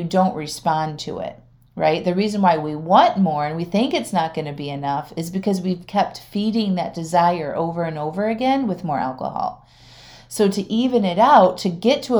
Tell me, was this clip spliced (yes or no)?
no